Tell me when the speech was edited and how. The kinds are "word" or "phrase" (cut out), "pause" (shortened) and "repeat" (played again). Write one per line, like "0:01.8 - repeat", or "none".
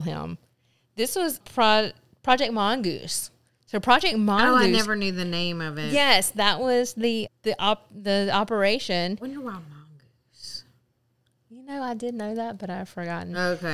0:01.4 - word
0:07.3 - word